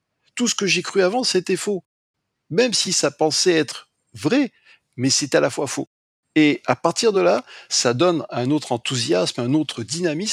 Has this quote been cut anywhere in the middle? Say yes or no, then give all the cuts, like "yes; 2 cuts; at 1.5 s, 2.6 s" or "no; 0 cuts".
no; 0 cuts